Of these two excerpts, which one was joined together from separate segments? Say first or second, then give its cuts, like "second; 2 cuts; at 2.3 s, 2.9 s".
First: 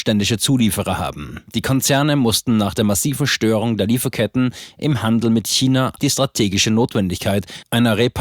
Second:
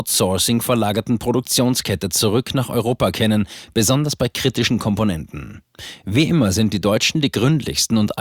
first; 2 cuts; at 1.5 s, 6.0 s